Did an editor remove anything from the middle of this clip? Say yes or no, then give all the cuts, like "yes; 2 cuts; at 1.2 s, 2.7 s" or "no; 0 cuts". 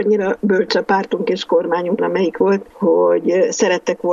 yes; 2 cuts; at 2.0 s, 2.7 s